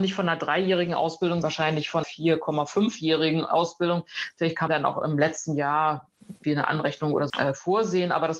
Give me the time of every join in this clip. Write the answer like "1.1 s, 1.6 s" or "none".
1.4 s, 2.0 s, 4.7 s, 6.4 s, 7.3 s